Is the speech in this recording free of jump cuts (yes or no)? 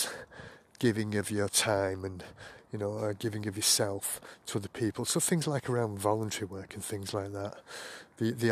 yes